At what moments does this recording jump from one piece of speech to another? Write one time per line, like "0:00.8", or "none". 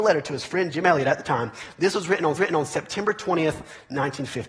0:02.4